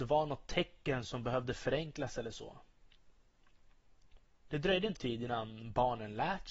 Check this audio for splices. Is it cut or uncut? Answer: cut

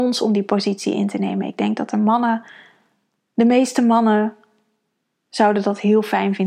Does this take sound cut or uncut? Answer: uncut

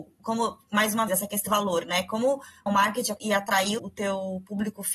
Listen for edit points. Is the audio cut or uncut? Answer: cut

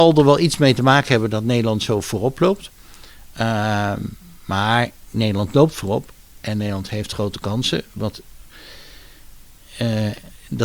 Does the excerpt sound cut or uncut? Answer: uncut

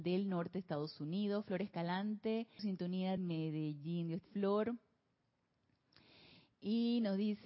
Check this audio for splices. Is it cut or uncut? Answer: cut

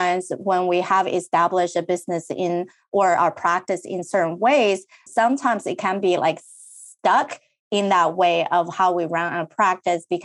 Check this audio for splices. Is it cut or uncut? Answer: cut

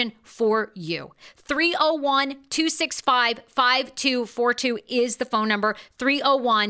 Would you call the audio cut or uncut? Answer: uncut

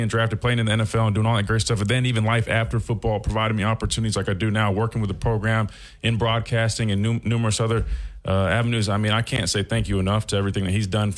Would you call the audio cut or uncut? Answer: uncut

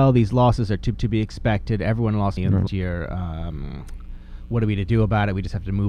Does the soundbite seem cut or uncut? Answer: cut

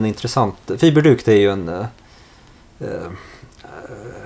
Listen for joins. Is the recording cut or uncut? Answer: uncut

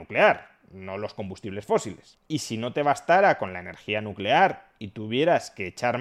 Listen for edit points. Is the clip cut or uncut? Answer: uncut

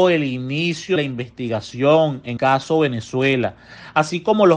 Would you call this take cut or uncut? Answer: cut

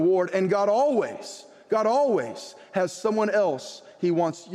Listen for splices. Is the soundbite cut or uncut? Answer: uncut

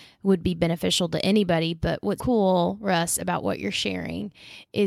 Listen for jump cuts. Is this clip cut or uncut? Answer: cut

